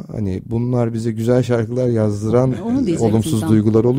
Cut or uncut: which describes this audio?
uncut